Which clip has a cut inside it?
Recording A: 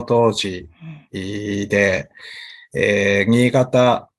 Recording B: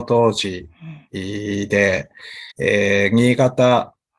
B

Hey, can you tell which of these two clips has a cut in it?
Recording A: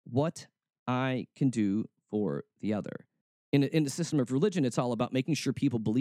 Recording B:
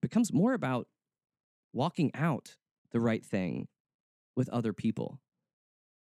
A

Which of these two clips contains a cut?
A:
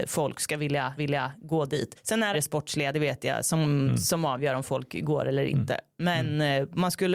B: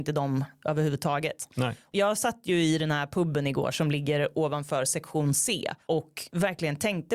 A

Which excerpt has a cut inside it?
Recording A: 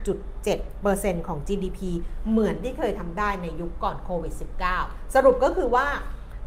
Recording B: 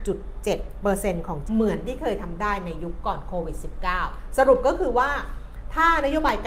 B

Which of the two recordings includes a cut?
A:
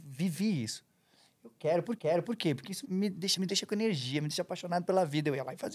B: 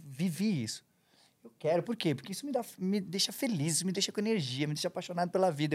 A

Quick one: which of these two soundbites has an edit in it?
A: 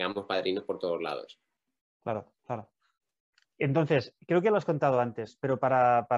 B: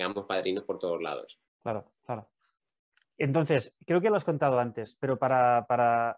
B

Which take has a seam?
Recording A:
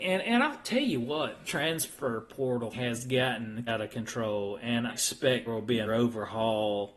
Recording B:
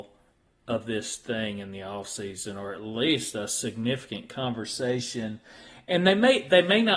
A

